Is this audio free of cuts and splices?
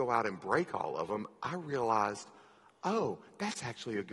yes; 0 cuts

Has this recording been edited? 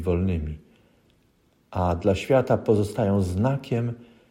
no; 0 cuts

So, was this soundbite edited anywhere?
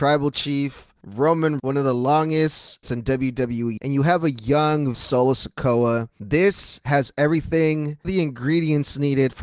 yes; 5 cuts; at 1.6 s, 2.8 s, 3.8 s, 4.9 s, 8.0 s

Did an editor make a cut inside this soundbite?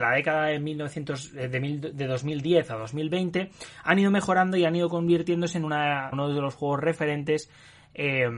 yes; 1 cut; at 6.1 s

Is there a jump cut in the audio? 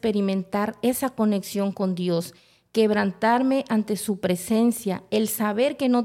no; 0 cuts

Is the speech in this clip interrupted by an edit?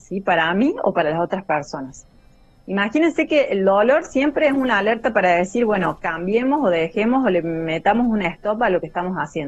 no; 0 cuts

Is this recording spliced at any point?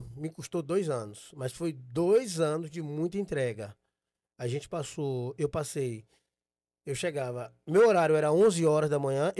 no; 0 cuts

